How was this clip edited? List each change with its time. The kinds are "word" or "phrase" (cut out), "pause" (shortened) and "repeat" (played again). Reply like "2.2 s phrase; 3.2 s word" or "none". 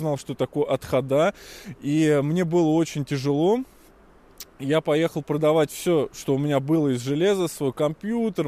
none